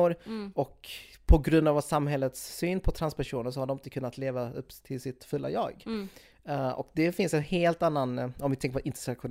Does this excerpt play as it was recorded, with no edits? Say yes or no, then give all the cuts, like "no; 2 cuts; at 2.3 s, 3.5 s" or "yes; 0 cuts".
yes; 0 cuts